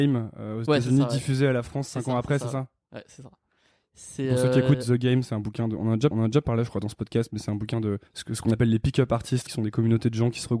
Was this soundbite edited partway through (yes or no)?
yes